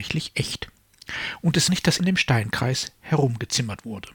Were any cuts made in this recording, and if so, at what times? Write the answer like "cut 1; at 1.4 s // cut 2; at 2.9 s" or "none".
cut 1; at 1.7 s // cut 2; at 2.0 s